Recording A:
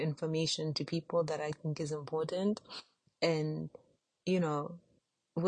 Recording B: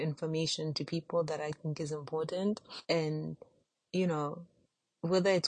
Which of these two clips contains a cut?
B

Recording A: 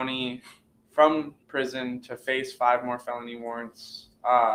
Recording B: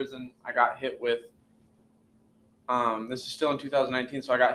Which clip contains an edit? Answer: A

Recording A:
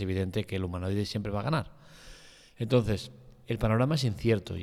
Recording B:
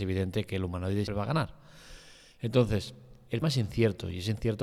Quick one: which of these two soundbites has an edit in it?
B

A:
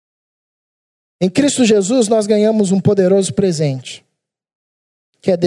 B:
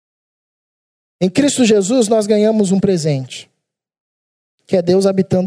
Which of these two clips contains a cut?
B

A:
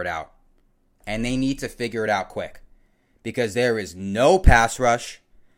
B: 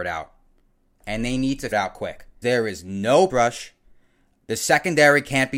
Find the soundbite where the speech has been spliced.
B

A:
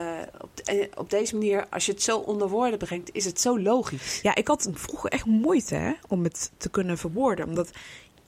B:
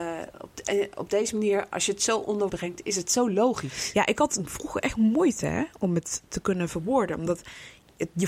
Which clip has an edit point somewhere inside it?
B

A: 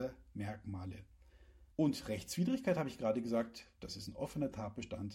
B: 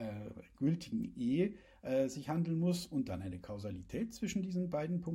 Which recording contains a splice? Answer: A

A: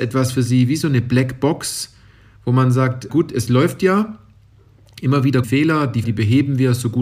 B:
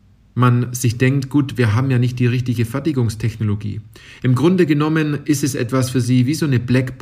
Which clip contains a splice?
A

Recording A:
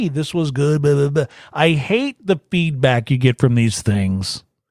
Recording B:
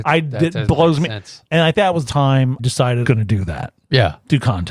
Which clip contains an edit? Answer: B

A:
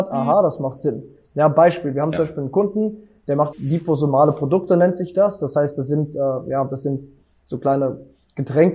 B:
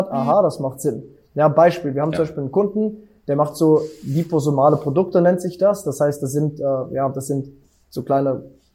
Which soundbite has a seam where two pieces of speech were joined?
A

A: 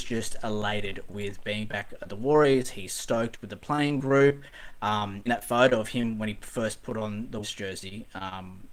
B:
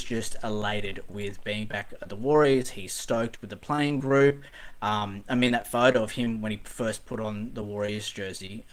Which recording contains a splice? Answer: A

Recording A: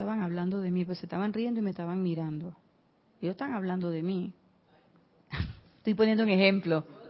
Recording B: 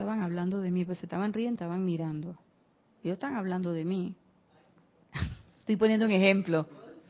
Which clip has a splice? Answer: B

